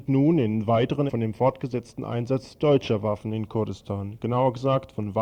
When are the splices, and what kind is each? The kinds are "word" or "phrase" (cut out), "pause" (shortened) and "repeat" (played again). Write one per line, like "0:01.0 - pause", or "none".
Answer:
0:01.1 - word